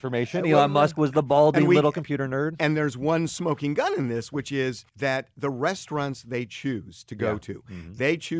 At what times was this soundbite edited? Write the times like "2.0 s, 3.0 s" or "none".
4.9 s